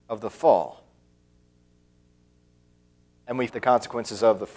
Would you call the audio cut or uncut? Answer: cut